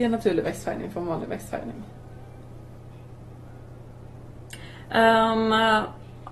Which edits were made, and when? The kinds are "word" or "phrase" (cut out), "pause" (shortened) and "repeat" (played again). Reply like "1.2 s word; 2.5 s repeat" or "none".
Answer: none